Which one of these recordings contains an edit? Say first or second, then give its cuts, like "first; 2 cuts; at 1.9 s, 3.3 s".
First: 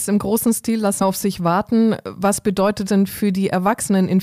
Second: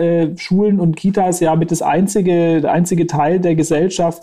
first; 2 cuts; at 1.0 s, 2.9 s